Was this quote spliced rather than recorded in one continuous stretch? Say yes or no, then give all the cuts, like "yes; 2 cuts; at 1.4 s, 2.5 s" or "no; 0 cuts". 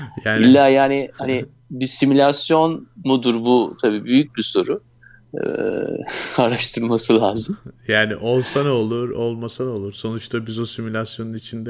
no; 0 cuts